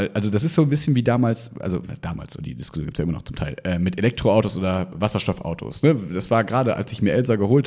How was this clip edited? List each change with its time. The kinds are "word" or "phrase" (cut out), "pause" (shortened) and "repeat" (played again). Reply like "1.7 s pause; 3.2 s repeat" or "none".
none